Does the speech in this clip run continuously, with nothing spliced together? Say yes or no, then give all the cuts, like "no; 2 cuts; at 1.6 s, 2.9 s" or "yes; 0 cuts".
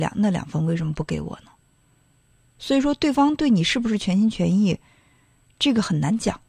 yes; 0 cuts